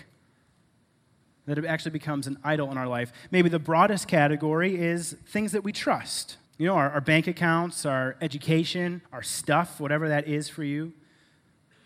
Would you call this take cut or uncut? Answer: cut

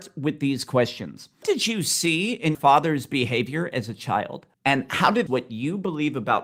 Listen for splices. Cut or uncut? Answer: cut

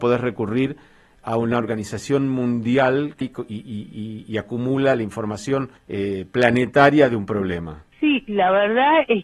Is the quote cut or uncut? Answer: cut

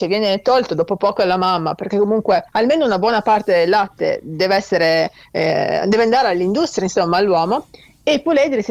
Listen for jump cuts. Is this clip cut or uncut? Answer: cut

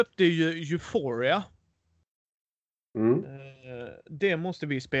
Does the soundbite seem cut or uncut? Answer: uncut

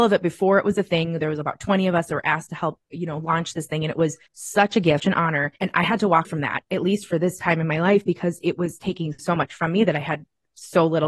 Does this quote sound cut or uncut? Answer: cut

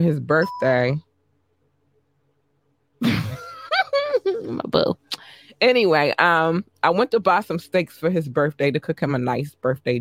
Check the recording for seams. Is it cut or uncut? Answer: uncut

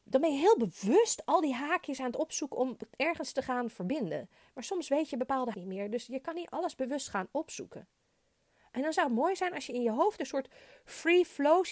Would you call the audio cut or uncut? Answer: cut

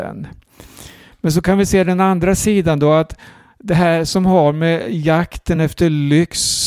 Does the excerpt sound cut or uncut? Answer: uncut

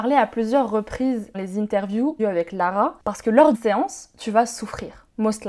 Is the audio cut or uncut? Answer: cut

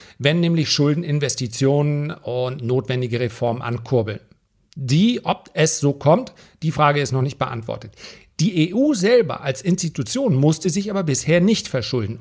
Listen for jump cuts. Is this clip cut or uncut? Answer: uncut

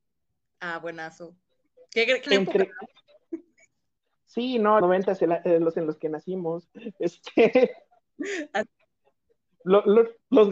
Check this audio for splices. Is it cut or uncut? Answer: cut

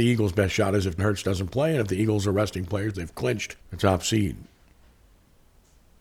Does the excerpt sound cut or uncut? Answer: cut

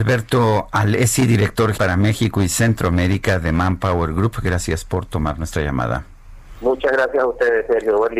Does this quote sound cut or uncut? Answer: cut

